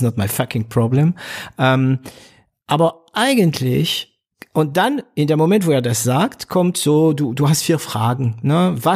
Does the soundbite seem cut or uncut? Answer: uncut